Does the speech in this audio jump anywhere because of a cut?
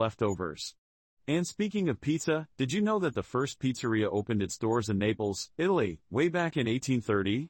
no; 0 cuts

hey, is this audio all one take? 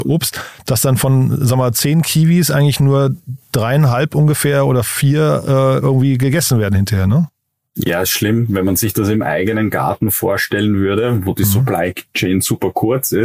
yes; 0 cuts

